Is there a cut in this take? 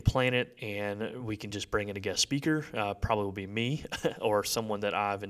no; 0 cuts

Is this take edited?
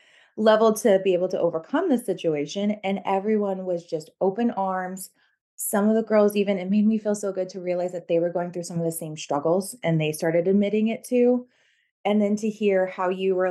no; 0 cuts

